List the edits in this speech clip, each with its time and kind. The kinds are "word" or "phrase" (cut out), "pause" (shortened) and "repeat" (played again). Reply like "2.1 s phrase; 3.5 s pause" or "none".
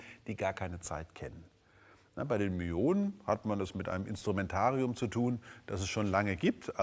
none